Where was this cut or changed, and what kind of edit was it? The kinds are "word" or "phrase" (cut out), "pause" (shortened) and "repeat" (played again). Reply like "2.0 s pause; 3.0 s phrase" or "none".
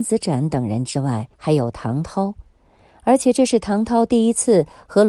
1.3 s pause